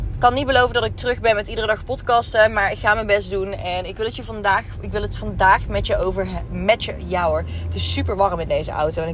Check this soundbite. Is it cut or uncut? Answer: uncut